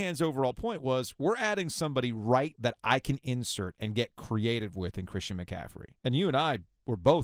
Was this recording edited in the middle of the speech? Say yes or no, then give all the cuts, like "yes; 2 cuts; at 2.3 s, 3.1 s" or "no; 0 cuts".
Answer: yes; 2 cuts; at 2.5 s, 6.0 s